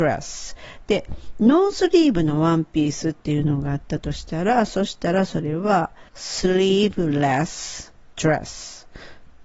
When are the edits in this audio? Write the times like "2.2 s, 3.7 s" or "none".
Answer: 6.1 s